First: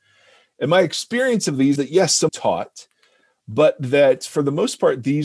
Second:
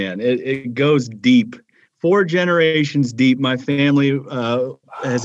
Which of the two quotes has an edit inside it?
first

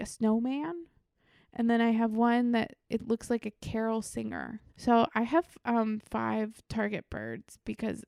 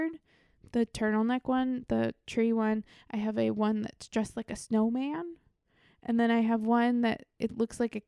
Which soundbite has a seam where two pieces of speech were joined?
first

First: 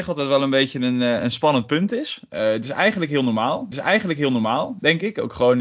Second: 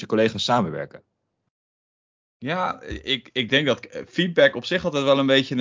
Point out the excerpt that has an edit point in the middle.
first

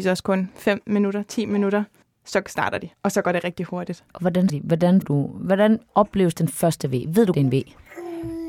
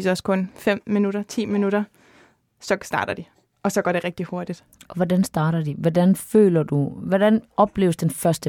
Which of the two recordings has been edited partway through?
first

